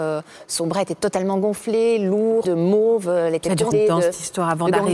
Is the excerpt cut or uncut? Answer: cut